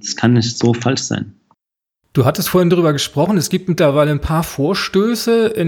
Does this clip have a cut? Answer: no; 0 cuts

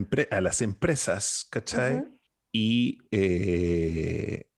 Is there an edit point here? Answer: yes; 1 cut; at 2.3 s

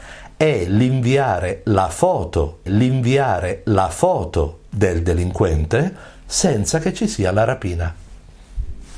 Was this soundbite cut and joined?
yes; 1 cut; at 2.7 s

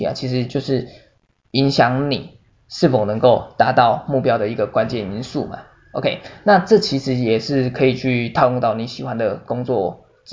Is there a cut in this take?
no; 0 cuts

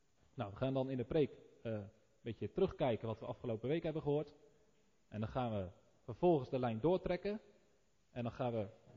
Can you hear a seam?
no; 0 cuts

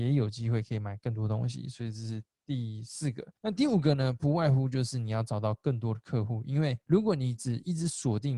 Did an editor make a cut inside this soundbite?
yes; 2 cuts; at 3.4 s, 6.8 s

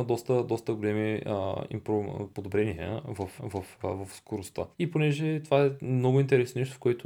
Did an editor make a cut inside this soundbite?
yes; 3 cuts; at 2.3 s, 3.4 s, 4.7 s

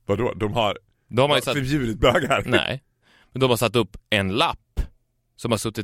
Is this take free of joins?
yes; 0 cuts

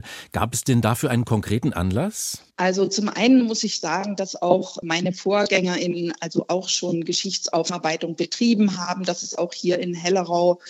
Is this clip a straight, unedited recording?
no; 1 cut; at 2.5 s

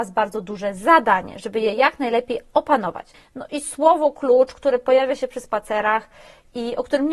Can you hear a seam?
no; 0 cuts

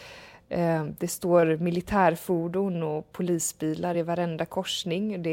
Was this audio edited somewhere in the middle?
no; 0 cuts

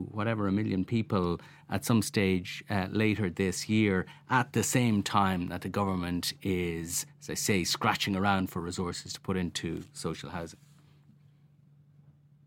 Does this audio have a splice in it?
no; 0 cuts

